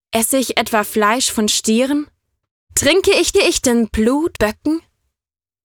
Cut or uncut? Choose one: cut